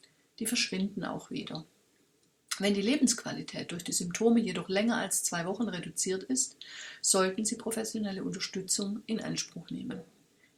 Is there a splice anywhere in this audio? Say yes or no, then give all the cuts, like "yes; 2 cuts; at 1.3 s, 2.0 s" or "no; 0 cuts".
no; 0 cuts